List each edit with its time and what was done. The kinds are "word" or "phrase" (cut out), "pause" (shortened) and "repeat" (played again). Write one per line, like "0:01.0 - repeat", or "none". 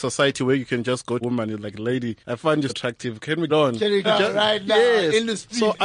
0:01.2 - phrase
0:02.2 - pause
0:02.7 - word
0:03.5 - phrase
0:04.0 - phrase

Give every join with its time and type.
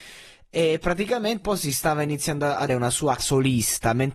0:01.4 - word
0:02.7 - word
0:03.2 - word

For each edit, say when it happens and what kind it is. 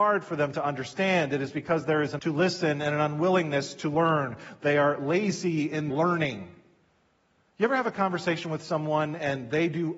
0:02.2 - word
0:05.9 - word

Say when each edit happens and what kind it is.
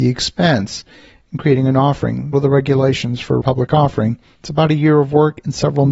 0:02.3 - phrase
0:03.4 - word

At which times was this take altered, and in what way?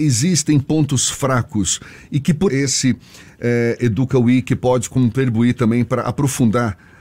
0:02.5 - word

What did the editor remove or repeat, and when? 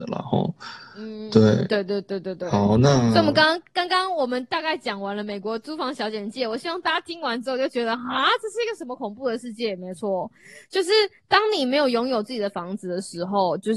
none

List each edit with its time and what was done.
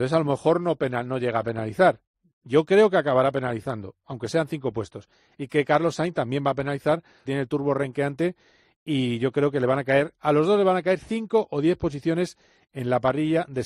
0:07.3 - word

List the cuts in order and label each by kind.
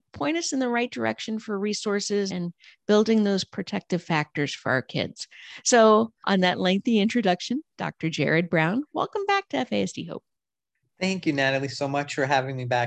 0:02.3 - word

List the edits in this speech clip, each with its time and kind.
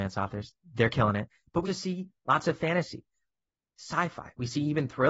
0:01.7 - word

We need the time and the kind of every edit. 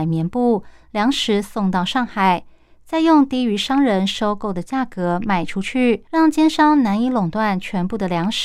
0:06.1 - pause

